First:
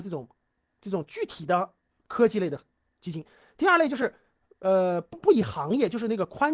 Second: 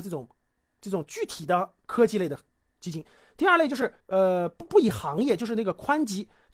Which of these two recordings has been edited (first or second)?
second